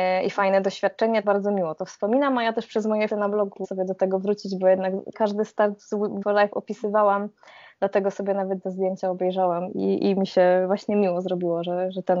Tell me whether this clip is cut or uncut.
cut